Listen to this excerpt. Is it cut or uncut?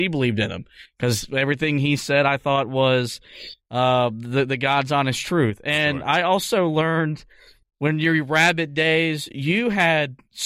uncut